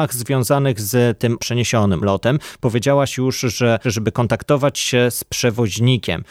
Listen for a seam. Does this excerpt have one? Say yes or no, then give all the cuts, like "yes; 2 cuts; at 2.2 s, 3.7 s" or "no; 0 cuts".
yes; 3 cuts; at 1.4 s, 2.0 s, 3.8 s